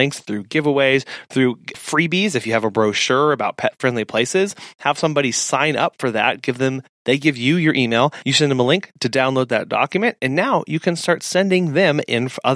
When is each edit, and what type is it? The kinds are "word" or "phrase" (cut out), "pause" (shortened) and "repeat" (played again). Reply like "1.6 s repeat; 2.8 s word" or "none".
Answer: 1.7 s word